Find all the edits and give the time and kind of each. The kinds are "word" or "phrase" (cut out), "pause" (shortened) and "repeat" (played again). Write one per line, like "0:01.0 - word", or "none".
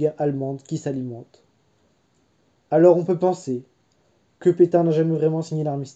none